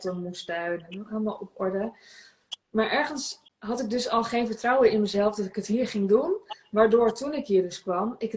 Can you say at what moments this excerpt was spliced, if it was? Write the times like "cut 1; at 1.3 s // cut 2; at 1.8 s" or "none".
cut 1; at 3.5 s